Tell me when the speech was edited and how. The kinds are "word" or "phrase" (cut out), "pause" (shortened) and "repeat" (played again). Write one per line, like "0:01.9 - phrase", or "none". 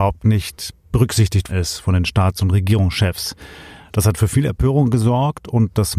0:01.5 - word